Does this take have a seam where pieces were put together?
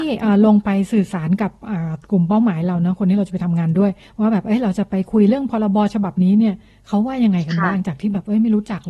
no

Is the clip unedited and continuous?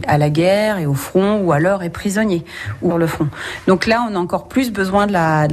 no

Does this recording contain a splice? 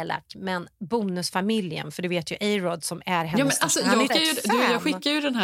yes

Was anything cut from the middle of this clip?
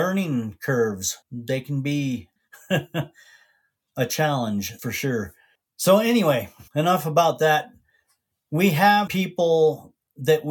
yes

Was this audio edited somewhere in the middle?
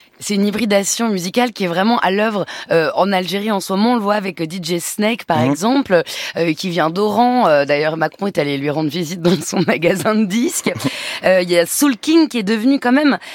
no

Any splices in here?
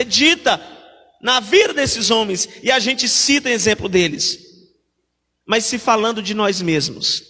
no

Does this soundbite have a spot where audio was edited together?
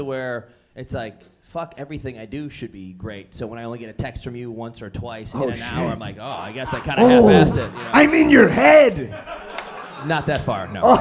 no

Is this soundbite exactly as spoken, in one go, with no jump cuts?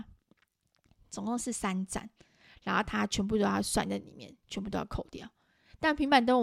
yes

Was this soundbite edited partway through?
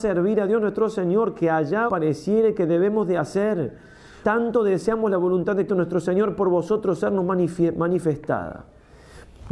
yes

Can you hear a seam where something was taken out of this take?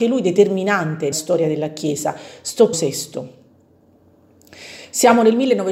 yes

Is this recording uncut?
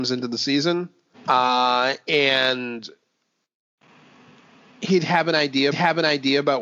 no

